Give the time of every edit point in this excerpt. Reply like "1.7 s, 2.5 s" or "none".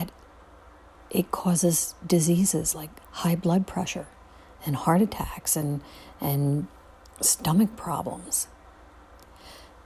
none